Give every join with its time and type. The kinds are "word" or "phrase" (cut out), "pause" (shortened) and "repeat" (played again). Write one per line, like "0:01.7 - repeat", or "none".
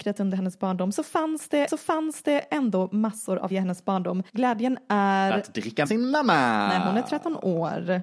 0:01.7 - repeat
0:03.5 - word
0:04.3 - pause
0:05.9 - word